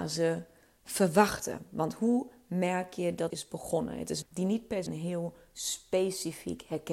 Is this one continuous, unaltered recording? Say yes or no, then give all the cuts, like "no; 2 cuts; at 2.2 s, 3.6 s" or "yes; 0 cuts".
no; 3 cuts; at 3.3 s, 4.2 s, 4.9 s